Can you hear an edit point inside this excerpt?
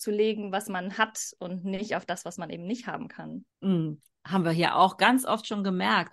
yes; 1 cut; at 3.5 s

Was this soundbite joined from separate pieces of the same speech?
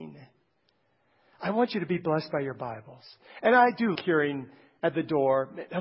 yes; 1 cut; at 3.9 s

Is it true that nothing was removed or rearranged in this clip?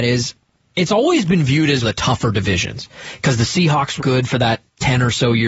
no; 2 cuts; at 1.8 s, 4.0 s

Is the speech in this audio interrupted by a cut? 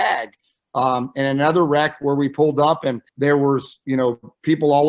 yes; 1 cut; at 3.1 s

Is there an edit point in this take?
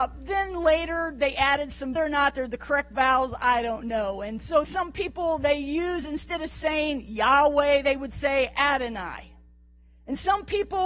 yes; 2 cuts; at 2.0 s, 4.6 s

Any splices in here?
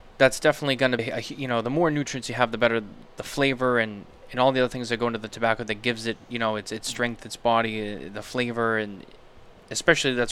yes; 1 cut; at 1.0 s

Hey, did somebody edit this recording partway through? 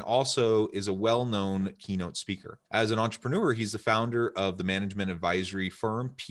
yes; 1 cut; at 2.7 s

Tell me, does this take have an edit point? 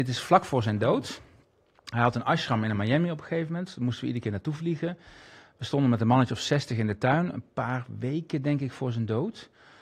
no; 0 cuts

